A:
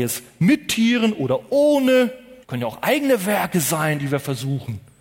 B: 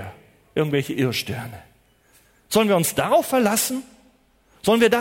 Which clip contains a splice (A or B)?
A